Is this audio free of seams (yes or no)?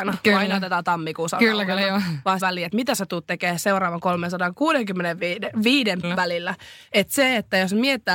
no